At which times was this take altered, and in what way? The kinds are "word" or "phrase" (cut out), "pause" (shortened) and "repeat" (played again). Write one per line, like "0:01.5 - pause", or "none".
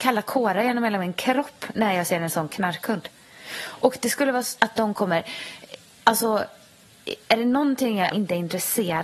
0:04.6 - word
0:08.1 - word